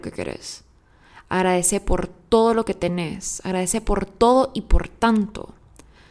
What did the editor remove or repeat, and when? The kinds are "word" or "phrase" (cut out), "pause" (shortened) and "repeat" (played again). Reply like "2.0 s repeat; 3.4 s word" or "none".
none